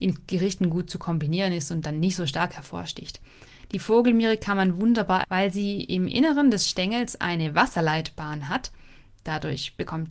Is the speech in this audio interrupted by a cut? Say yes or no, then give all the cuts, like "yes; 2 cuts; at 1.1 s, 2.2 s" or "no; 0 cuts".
yes; 1 cut; at 5.2 s